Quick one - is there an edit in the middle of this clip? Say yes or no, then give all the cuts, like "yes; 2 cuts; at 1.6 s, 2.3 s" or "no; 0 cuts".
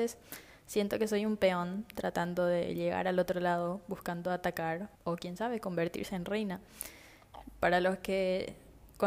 yes; 1 cut; at 4.9 s